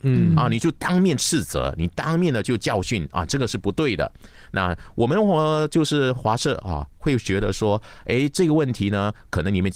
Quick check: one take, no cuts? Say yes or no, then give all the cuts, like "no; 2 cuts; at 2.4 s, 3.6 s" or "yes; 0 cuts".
yes; 0 cuts